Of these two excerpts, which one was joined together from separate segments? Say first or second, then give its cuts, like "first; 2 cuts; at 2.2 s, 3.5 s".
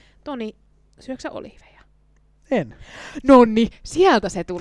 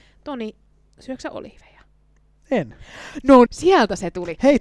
second; 1 cut; at 3.5 s